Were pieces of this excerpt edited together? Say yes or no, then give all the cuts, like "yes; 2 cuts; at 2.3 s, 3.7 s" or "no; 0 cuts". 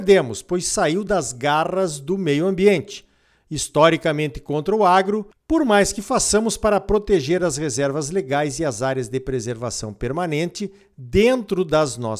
no; 0 cuts